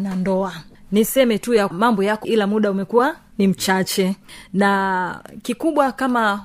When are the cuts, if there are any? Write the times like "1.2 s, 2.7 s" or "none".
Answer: 1.7 s, 2.2 s